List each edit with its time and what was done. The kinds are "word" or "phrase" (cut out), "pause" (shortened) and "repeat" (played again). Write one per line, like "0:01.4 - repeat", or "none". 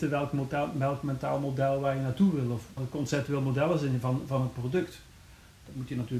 0:02.8 - phrase

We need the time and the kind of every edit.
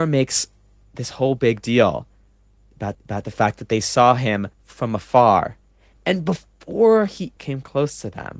0:02.9 - repeat
0:04.5 - pause
0:07.4 - word

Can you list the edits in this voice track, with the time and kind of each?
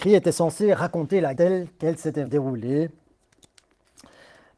0:01.4 - word
0:02.3 - word

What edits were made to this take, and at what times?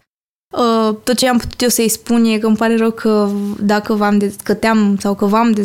none

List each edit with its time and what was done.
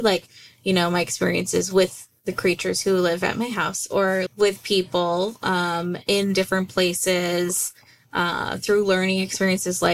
0:04.3 - word

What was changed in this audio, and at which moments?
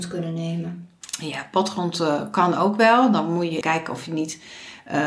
0:03.6 - word

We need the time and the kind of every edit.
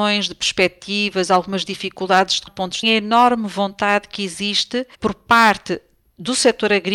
0:02.5 - word
0:02.8 - phrase
0:04.9 - pause

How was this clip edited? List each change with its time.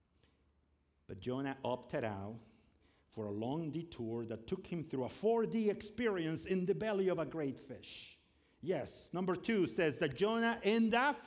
none

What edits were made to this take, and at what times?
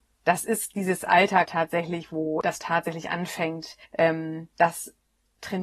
0:01.5 - word
0:02.6 - phrase
0:03.8 - pause

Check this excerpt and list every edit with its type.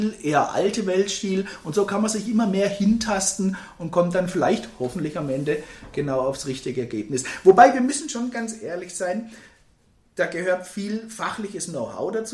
none

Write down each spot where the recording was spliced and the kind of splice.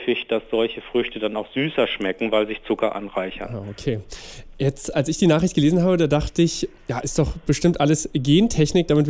none

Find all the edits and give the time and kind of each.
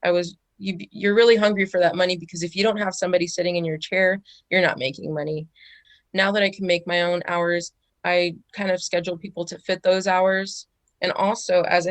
none

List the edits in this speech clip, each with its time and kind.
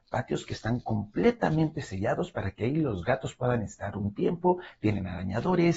none

